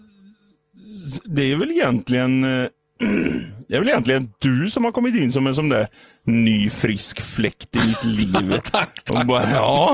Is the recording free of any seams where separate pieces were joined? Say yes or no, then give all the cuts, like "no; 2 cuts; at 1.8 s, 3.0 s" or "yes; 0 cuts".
yes; 0 cuts